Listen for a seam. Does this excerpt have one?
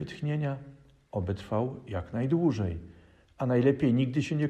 no; 0 cuts

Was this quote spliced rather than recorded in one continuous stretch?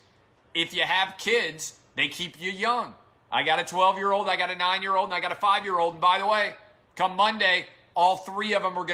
no; 0 cuts

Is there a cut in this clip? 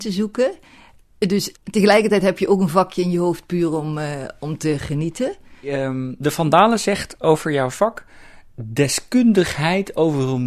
yes; 1 cut; at 1.6 s

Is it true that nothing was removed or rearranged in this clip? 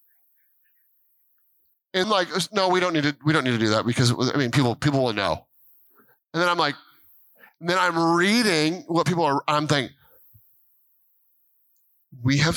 no; 1 cut; at 2.0 s

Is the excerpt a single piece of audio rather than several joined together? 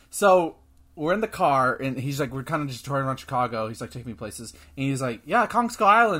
yes; 0 cuts

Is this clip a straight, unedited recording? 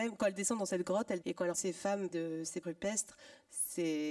no; 4 cuts; at 1.2 s, 1.5 s, 2.1 s, 2.6 s

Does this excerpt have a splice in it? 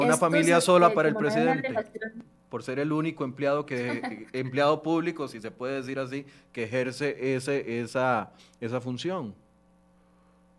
no; 0 cuts

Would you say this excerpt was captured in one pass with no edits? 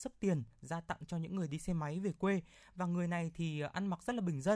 yes; 0 cuts

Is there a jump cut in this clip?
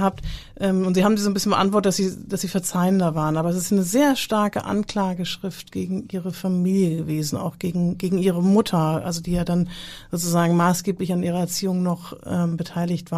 no; 0 cuts

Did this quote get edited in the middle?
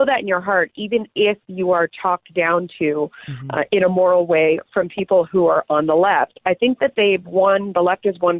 no; 0 cuts

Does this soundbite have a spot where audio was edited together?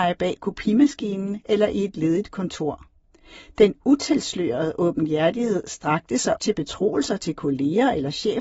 yes; 1 cut; at 6.4 s

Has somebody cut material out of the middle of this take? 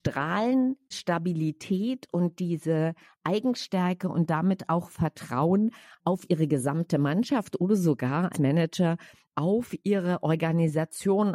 yes; 2 cuts; at 0.9 s, 8.3 s

